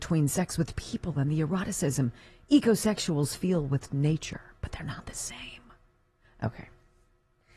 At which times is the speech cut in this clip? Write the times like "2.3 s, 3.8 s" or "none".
none